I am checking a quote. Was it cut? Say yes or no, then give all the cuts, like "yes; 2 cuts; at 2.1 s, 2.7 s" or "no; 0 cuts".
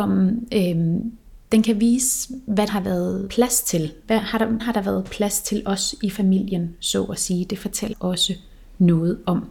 yes; 5 cuts; at 1.4 s, 2.7 s, 3.3 s, 4.6 s, 7.9 s